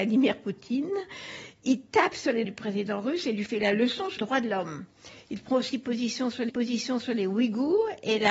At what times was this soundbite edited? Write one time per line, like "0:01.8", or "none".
0:02.4
0:04.2
0:06.5